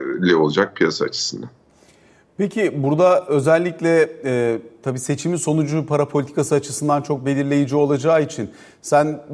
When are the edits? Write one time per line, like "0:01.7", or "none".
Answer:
none